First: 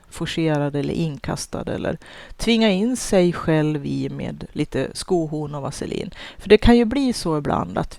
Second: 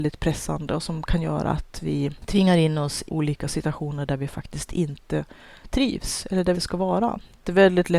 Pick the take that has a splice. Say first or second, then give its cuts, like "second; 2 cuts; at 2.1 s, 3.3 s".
second; 2 cuts; at 3.1 s, 6.5 s